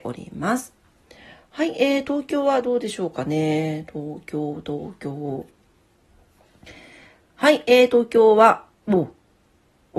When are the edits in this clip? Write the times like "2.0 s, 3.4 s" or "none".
none